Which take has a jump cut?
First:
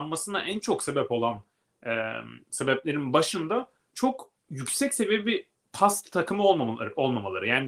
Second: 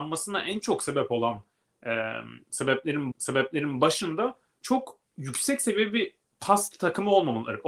second; 1 cut; at 3.1 s

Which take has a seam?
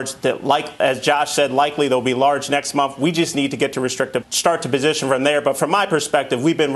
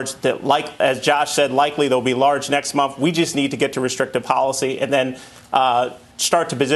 first; 1 cut; at 4.2 s

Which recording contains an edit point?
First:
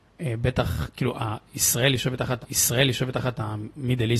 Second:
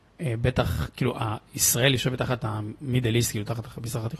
first; 1 cut; at 2.4 s

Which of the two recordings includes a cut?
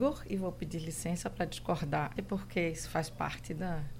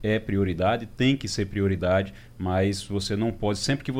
first; 1 cut; at 2.2 s

